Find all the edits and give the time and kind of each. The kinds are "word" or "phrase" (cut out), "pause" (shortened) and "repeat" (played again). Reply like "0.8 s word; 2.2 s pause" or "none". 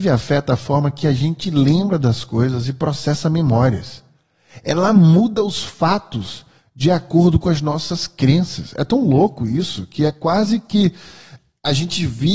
none